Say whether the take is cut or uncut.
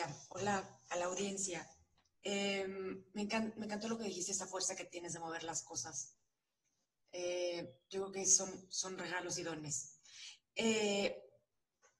uncut